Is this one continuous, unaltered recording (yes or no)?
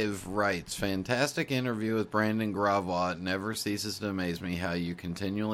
yes